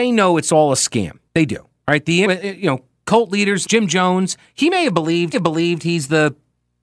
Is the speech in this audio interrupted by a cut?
yes; 4 cuts; at 1.3 s, 2.3 s, 3.7 s, 5.3 s

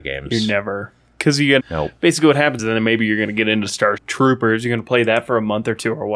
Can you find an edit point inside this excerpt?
yes; 3 cuts; at 1.6 s, 2.6 s, 4.0 s

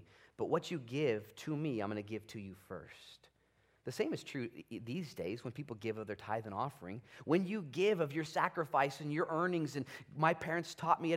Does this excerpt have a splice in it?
no; 0 cuts

